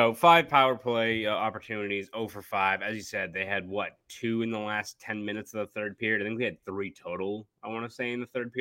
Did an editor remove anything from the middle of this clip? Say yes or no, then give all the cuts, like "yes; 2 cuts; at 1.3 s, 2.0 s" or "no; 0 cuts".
no; 0 cuts